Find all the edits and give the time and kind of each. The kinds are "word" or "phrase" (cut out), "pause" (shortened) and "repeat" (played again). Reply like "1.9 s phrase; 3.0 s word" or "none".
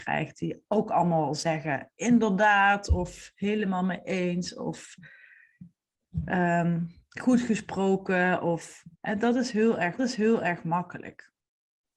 8.9 s pause; 10.0 s repeat

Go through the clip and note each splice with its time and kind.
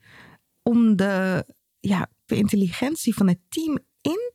2.3 s word

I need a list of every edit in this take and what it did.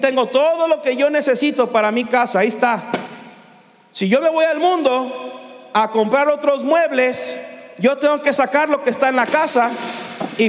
none

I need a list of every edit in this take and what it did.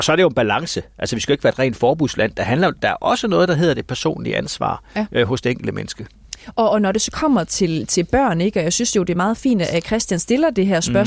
none

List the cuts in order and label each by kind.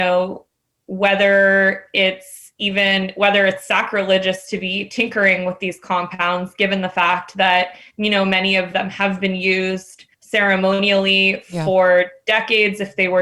10.1 s pause

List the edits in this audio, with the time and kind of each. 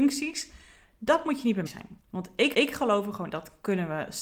1.7 s word; 2.0 s pause; 2.5 s repeat; 3.3 s word

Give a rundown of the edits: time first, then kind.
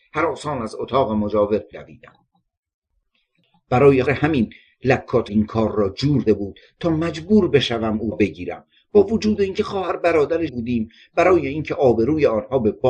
1.7 s word; 4.1 s word; 5.3 s word; 6.3 s word; 8.1 s word; 10.5 s word

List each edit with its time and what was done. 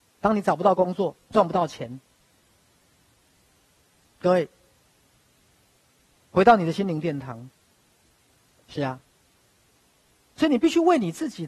none

